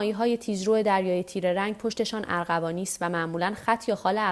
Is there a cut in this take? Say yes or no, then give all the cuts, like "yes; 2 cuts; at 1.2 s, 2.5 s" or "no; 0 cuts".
no; 0 cuts